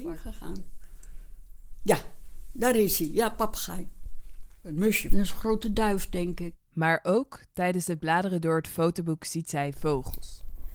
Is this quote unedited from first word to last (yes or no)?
yes